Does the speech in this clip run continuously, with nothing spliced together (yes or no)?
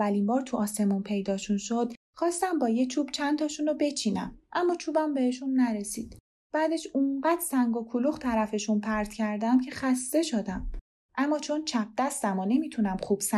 yes